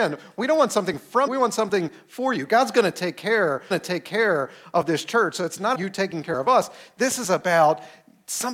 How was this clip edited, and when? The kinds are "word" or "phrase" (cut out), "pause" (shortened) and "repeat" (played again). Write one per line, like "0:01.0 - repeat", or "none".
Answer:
0:01.3 - word
0:03.7 - repeat
0:05.7 - word